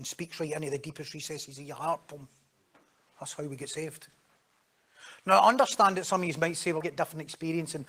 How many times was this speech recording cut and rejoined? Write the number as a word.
one